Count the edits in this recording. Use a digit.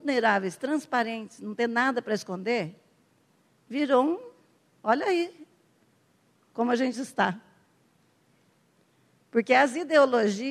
0